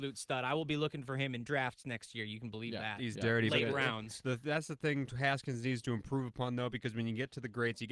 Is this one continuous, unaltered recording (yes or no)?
yes